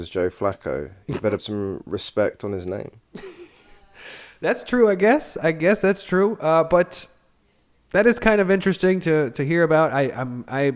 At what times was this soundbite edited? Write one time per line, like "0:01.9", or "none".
0:01.4